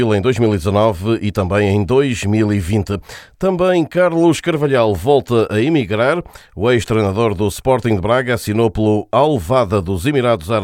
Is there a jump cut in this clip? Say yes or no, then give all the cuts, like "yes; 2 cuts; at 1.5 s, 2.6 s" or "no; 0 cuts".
no; 0 cuts